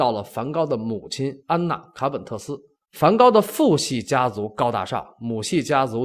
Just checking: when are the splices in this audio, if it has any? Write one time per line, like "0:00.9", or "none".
0:01.4
0:02.8